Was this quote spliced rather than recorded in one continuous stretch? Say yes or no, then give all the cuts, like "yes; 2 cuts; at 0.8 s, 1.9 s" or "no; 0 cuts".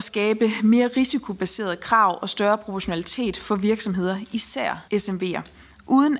yes; 1 cut; at 4.9 s